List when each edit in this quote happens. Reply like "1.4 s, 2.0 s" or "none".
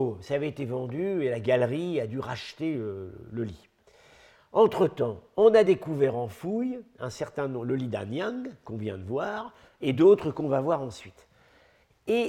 none